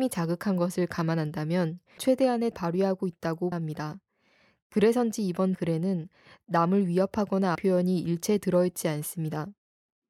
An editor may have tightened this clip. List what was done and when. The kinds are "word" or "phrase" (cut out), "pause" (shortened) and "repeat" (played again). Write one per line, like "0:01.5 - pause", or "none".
0:02.0 - word
0:02.5 - word
0:03.5 - word
0:05.5 - word
0:07.5 - word